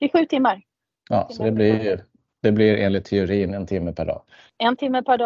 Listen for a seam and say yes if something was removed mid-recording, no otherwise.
no